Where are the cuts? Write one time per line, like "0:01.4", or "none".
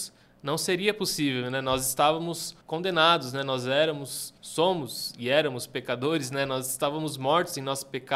0:02.6
0:04.4